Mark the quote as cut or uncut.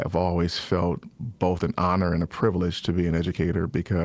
uncut